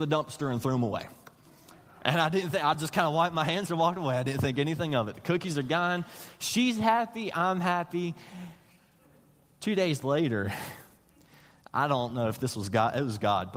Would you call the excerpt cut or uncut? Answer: uncut